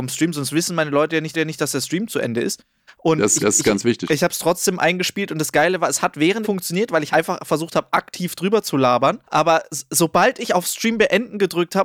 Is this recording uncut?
no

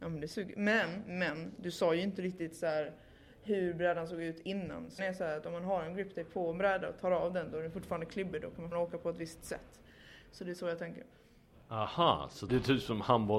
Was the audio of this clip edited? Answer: yes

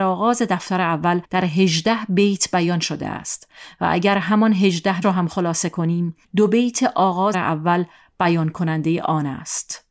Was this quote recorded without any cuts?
no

